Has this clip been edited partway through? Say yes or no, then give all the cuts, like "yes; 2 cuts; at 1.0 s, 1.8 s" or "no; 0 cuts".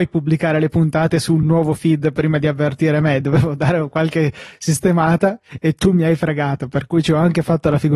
no; 0 cuts